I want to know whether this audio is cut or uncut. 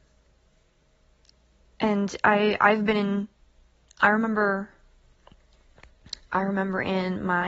uncut